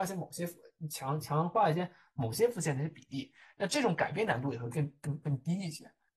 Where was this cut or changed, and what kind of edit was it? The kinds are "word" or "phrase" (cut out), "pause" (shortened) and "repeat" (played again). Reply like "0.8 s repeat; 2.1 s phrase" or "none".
none